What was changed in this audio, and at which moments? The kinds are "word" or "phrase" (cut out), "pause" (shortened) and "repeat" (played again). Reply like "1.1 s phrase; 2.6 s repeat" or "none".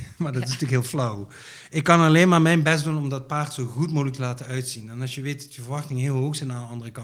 none